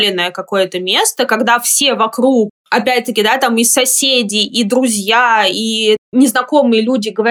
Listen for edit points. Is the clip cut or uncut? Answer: uncut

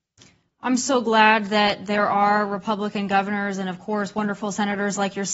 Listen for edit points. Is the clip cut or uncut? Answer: uncut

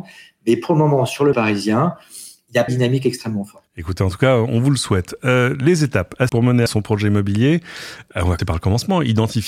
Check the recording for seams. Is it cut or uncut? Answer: cut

